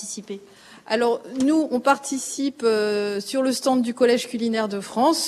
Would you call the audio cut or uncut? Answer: uncut